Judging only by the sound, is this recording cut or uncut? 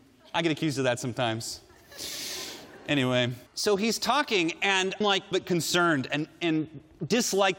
cut